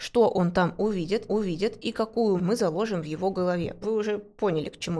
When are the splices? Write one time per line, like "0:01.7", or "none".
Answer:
0:01.3
0:02.4
0:03.8